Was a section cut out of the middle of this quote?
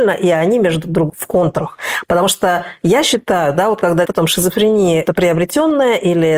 yes; 3 cuts; at 1.1 s, 4.0 s, 5.0 s

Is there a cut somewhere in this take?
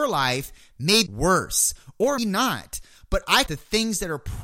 yes; 3 cuts; at 1.1 s, 2.2 s, 3.5 s

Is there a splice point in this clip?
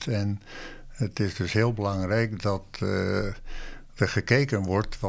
no; 0 cuts

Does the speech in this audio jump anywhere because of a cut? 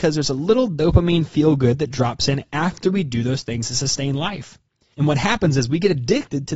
no; 0 cuts

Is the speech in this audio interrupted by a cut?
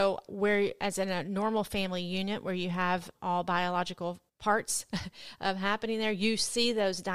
no; 0 cuts

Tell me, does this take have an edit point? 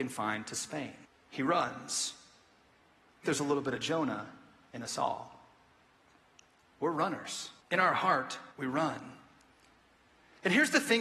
yes; 4 cuts; at 1.0 s, 3.2 s, 7.6 s, 8.5 s

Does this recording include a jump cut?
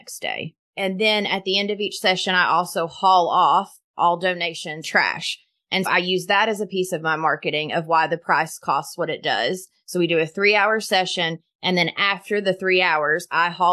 yes; 2 cuts; at 4.8 s, 5.9 s

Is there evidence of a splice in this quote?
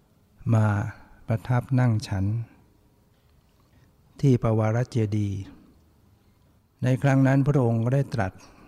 no; 0 cuts

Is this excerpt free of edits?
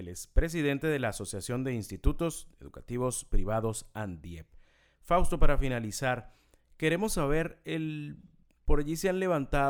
yes; 0 cuts

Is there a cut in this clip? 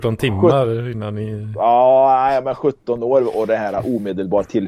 no; 0 cuts

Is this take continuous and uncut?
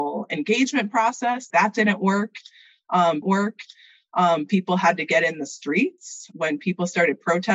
no; 3 cuts; at 1.5 s, 3.2 s, 6.3 s

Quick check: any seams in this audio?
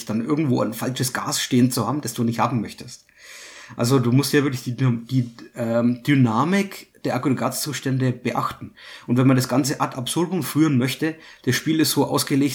no; 0 cuts

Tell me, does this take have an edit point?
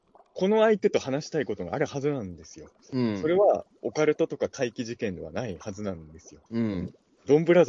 yes; 1 cut; at 6.5 s

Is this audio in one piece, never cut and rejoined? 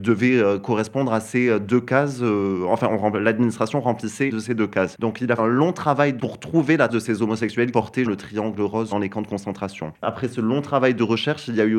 no; 7 cuts; at 4.3 s, 5.4 s, 6.2 s, 6.9 s, 7.7 s, 8.1 s, 8.9 s

